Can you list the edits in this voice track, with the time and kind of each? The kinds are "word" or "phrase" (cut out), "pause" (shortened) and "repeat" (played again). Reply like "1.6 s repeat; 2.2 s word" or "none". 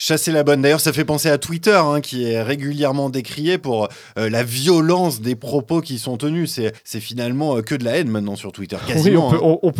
6.8 s pause